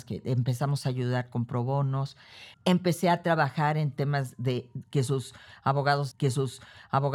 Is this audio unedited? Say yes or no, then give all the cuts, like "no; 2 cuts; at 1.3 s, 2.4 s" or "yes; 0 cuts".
no; 2 cuts; at 2.5 s, 6.1 s